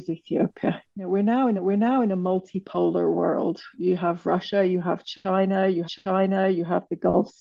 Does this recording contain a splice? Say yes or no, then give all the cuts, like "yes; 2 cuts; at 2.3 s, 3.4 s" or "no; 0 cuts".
yes; 2 cuts; at 1.6 s, 5.8 s